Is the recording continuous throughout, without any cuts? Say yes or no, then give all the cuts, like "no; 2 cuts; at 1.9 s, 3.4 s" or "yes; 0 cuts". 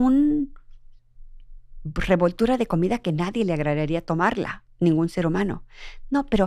yes; 0 cuts